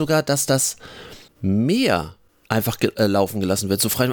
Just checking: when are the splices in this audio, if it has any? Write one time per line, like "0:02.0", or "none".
none